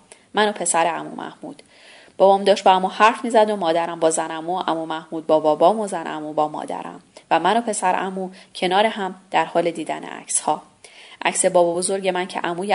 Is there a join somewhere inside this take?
no; 0 cuts

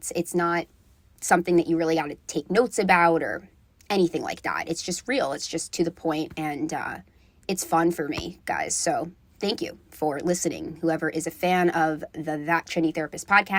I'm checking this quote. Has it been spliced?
no; 0 cuts

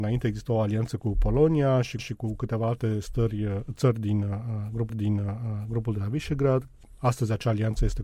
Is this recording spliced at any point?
yes; 2 cuts; at 2.0 s, 4.9 s

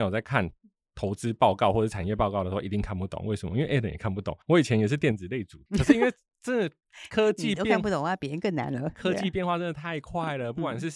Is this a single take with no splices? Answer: no; 2 cuts; at 4.4 s, 5.7 s

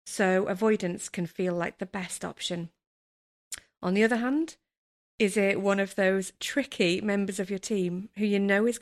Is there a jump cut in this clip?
no; 0 cuts

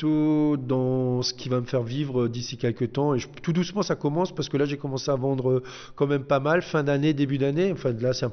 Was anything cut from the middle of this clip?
no; 0 cuts

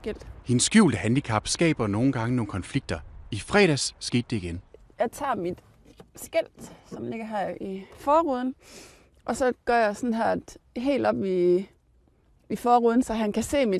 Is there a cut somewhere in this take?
no; 0 cuts

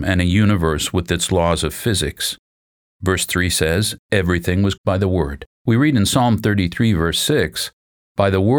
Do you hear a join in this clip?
yes; 2 cuts; at 4.8 s, 5.5 s

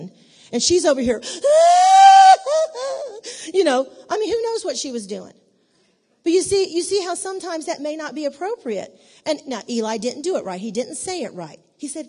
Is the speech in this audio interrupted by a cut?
no; 0 cuts

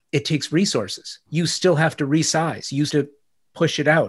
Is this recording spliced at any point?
yes; 2 cuts; at 1.3 s, 2.9 s

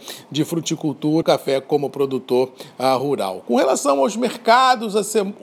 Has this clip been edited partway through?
yes; 1 cut; at 1.2 s

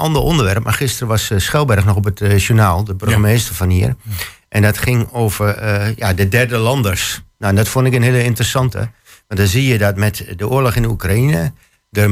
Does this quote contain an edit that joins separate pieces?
no; 0 cuts

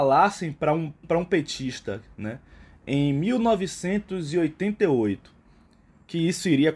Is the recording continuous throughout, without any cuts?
no; 1 cut; at 1.0 s

